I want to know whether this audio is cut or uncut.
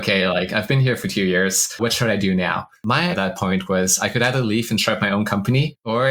cut